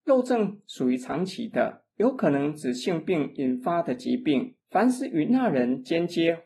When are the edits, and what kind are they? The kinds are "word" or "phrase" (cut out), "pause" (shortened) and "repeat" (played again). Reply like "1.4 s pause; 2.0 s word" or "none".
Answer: 1.9 s pause; 4.6 s pause